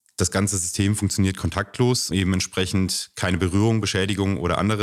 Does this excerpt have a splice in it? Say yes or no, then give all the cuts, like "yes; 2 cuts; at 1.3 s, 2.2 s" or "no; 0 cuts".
yes; 1 cut; at 2.1 s